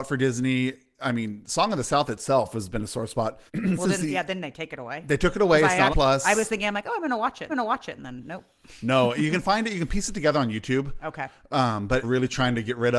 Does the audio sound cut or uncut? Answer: cut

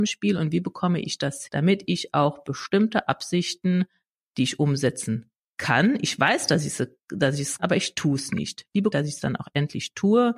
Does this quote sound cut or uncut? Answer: cut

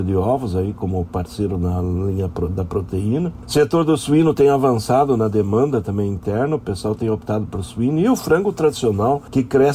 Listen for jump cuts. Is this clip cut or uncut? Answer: uncut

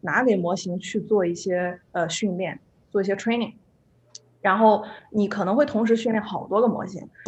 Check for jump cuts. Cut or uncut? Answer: uncut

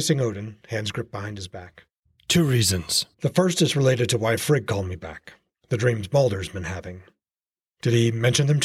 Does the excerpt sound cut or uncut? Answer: cut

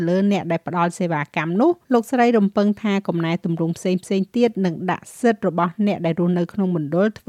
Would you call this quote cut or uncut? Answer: cut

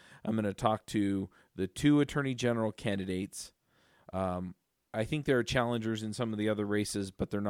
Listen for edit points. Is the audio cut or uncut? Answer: uncut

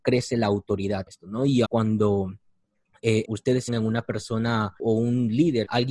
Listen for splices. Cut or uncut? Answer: cut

